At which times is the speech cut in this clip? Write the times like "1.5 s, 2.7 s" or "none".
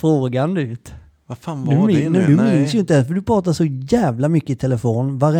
none